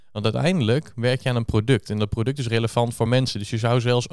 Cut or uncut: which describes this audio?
uncut